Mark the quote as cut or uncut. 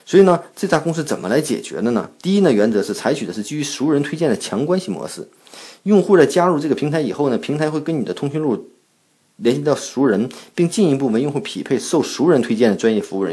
uncut